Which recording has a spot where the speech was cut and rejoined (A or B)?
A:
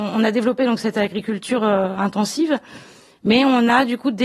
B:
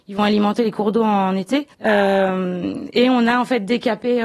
B